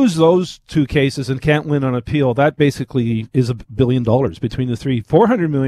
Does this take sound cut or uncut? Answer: uncut